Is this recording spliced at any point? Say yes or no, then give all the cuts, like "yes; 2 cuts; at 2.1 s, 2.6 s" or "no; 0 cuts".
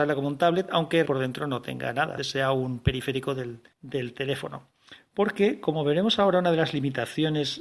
yes; 3 cuts; at 1.1 s, 2.2 s, 3.7 s